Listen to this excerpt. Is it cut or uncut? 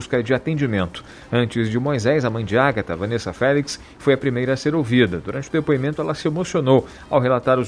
uncut